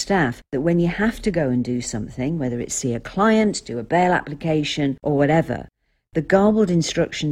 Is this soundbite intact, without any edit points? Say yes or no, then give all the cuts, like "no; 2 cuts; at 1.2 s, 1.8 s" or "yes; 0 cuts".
yes; 0 cuts